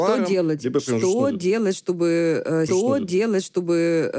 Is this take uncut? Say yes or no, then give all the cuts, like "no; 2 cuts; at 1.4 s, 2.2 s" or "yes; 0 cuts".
no; 1 cut; at 2.7 s